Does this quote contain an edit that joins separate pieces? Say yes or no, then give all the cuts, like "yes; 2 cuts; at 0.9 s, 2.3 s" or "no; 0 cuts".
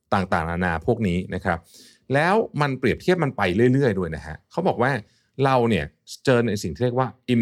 no; 0 cuts